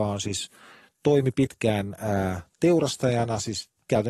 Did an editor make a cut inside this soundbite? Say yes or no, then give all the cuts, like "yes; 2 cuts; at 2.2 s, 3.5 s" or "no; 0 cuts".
no; 0 cuts